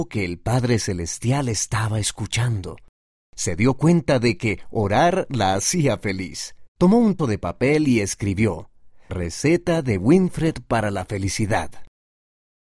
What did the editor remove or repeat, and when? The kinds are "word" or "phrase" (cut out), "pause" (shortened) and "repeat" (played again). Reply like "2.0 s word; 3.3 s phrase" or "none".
6.7 s pause; 7.2 s word; 9.1 s word